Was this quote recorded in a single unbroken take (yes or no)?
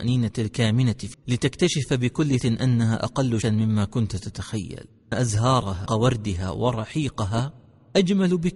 no